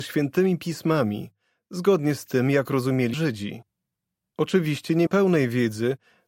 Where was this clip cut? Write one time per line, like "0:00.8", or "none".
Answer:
0:03.1
0:05.1